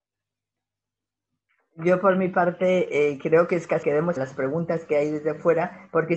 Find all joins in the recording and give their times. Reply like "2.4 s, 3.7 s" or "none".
3.8 s, 4.2 s